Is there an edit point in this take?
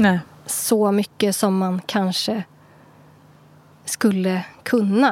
no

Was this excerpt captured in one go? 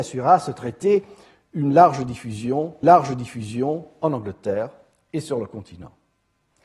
no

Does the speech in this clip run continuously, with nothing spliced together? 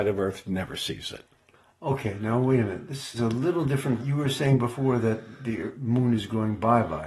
no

